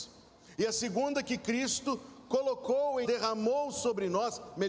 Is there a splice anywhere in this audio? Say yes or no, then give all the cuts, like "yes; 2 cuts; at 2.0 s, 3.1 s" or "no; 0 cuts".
yes; 1 cut; at 3.0 s